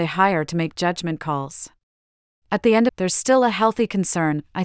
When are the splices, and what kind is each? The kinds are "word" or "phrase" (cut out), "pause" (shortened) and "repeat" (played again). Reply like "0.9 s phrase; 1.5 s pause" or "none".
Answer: 1.9 s pause; 2.9 s phrase